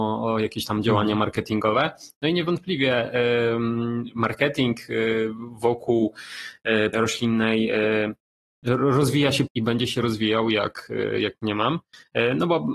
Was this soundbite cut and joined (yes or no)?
yes